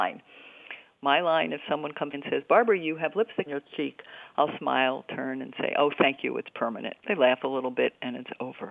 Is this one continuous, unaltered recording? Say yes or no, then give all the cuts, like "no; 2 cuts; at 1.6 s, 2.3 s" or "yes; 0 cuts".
no; 3 cuts; at 2.1 s, 3.5 s, 7.0 s